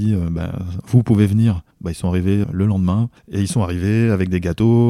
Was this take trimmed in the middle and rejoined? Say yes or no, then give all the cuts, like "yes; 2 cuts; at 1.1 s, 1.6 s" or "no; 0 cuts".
yes; 3 cuts; at 1.7 s, 2.4 s, 3.2 s